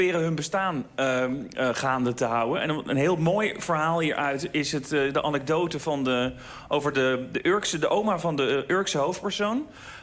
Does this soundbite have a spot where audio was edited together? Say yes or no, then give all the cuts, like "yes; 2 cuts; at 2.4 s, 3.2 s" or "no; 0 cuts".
no; 0 cuts